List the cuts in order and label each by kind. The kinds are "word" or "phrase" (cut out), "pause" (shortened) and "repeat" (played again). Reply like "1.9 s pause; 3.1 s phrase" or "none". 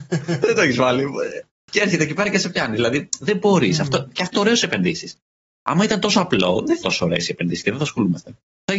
4.3 s word; 6.8 s word